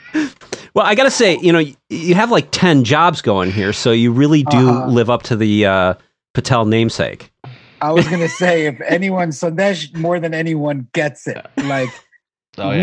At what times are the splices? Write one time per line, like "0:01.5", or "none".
none